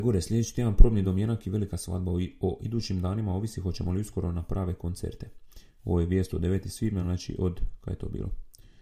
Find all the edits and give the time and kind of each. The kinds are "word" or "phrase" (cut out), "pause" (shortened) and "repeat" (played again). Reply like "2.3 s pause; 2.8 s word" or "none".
none